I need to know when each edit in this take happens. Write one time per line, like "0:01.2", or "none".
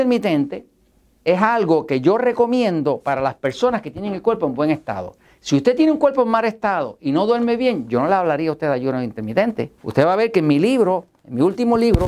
0:09.8